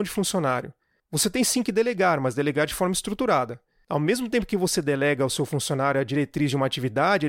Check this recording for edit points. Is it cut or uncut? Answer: uncut